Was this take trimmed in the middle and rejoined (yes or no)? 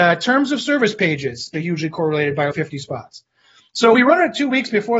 yes